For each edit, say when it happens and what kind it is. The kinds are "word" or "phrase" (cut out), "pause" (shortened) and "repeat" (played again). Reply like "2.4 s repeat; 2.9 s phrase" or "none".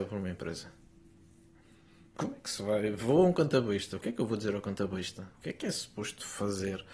5.3 s pause